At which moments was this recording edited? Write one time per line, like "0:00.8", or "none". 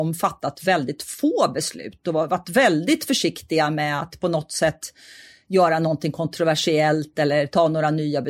none